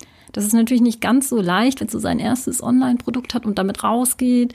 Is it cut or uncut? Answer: cut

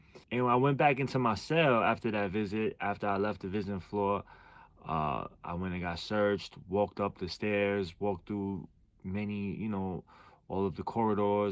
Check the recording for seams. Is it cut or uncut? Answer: uncut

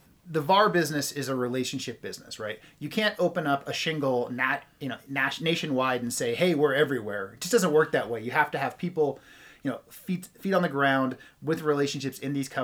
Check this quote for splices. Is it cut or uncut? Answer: uncut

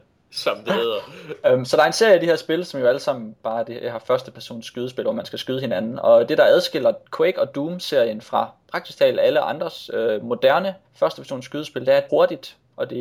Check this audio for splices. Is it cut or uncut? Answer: cut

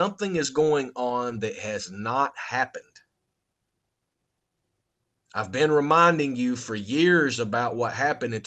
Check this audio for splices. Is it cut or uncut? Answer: uncut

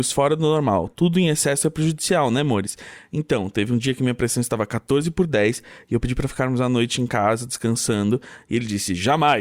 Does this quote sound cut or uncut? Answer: uncut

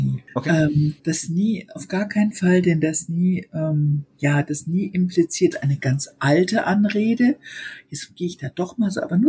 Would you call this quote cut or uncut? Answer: cut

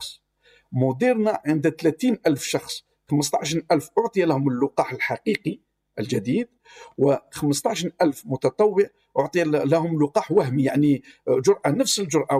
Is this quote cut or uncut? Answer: uncut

